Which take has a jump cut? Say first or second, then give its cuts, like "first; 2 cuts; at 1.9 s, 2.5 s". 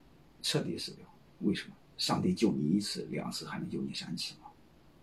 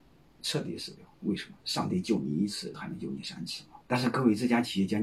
second; 4 cuts; at 1.1 s, 1.6 s, 2.7 s, 3.8 s